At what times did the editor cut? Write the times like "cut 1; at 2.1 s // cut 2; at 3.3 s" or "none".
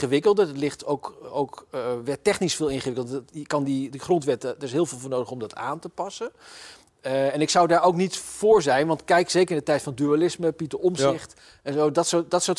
none

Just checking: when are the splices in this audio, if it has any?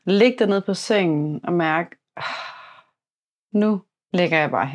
none

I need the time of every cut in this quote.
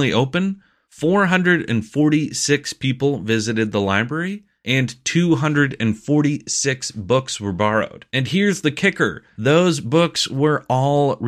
none

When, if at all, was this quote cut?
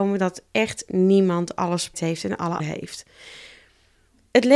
cut 1; at 1.9 s // cut 2; at 2.6 s

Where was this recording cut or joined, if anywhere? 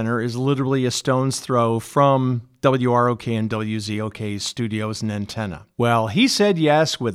cut 1; at 5.7 s

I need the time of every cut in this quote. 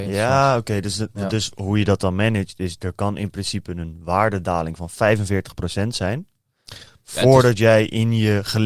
none

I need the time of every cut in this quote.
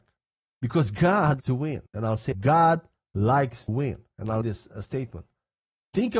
cut 1; at 1.4 s // cut 2; at 1.9 s // cut 3; at 2.3 s // cut 4; at 3.7 s // cut 5; at 4.4 s

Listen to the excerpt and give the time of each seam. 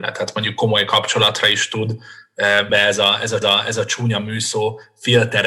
cut 1; at 2.7 s // cut 2; at 3.4 s

